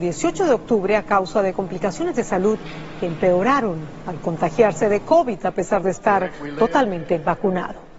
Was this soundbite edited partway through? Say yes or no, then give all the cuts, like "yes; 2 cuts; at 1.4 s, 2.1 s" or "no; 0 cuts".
no; 0 cuts